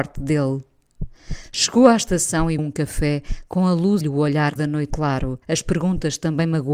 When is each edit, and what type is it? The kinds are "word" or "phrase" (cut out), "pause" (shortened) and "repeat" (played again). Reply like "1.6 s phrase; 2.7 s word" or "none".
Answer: 2.6 s word; 4.0 s phrase; 4.6 s word; 4.9 s word; 5.4 s pause